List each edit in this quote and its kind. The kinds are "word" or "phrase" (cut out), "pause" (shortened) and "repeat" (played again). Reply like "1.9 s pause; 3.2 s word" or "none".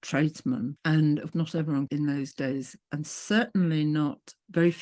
1.3 s word; 1.9 s phrase; 2.8 s pause

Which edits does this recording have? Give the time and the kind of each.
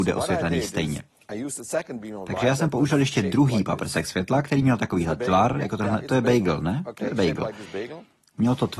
none

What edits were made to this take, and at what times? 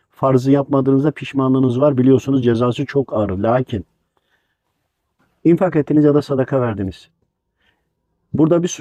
none

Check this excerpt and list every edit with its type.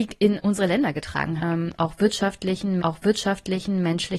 1.4 s phrase; 2.8 s repeat

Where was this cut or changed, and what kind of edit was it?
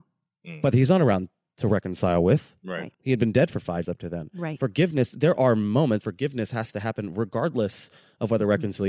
2.9 s pause; 3.8 s word; 6.0 s word

